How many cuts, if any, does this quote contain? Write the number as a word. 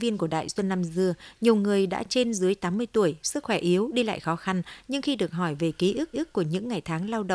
one